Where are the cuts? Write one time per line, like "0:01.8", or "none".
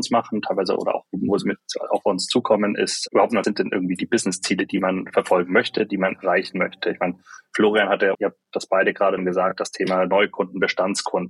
0:03.4
0:08.1
0:09.2